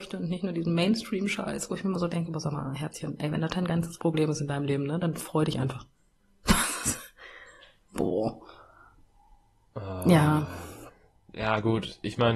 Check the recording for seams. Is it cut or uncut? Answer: uncut